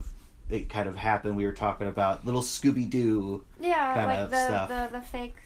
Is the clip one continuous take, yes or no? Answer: yes